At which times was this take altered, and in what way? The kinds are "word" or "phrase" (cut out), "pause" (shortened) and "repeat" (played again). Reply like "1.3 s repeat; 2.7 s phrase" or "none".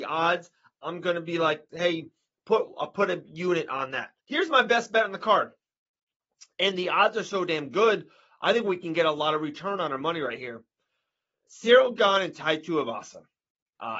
4.2 s pause

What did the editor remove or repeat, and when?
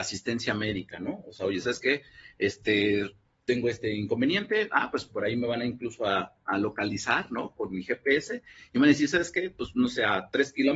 none

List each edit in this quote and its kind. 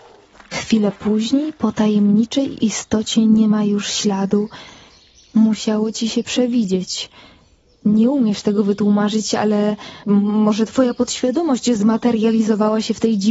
10.0 s word

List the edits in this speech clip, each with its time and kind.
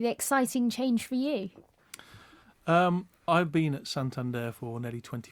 3.3 s word

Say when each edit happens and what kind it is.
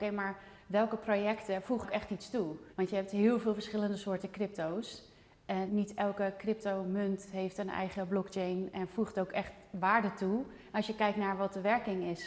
1.8 s word; 2.7 s pause; 5.7 s word

